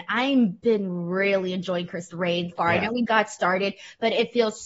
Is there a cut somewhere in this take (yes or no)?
yes